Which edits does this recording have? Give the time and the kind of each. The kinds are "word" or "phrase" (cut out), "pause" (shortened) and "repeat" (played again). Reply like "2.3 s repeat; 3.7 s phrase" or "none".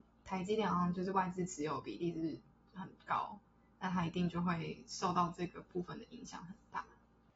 none

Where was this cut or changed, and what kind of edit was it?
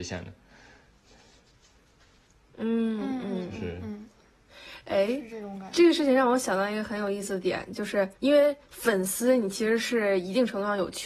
8.2 s pause

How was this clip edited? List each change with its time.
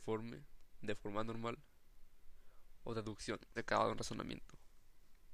3.6 s word

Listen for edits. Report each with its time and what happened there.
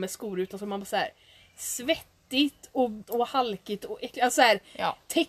3.0 s word

